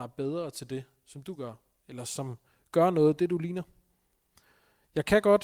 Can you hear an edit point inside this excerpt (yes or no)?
no